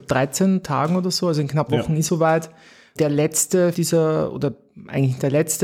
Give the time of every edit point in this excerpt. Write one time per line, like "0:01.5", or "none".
0:01.7
0:02.1
0:03.0
0:03.7